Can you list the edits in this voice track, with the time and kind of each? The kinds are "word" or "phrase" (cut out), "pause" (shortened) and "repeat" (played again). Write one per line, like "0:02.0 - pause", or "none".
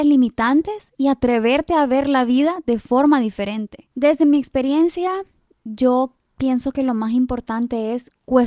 0:03.9 - pause